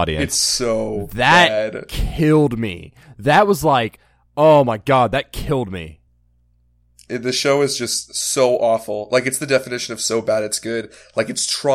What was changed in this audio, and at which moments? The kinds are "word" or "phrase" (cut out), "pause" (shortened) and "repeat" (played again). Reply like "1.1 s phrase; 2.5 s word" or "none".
none